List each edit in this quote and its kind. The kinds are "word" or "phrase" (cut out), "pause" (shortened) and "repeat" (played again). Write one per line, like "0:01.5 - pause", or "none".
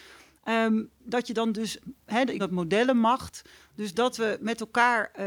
0:01.0 - word
0:02.4 - word